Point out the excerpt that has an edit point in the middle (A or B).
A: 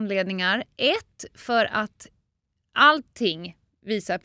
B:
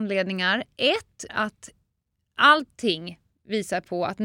B